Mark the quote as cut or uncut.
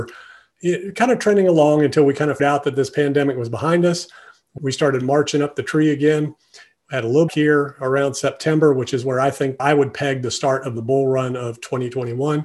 cut